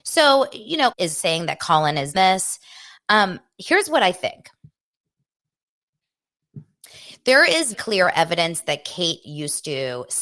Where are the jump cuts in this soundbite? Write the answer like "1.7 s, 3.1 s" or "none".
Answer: 0.9 s, 2.1 s, 7.7 s